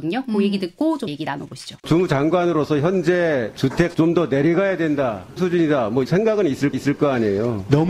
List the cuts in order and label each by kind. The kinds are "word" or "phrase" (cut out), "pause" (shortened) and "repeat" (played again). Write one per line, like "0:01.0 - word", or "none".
0:01.1 - word
0:01.8 - pause
0:03.9 - word
0:05.4 - word
0:06.0 - word
0:06.7 - repeat